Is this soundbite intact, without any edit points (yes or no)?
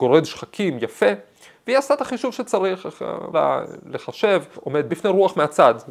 no